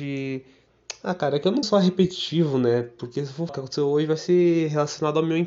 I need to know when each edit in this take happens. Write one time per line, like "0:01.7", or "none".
0:01.6
0:03.5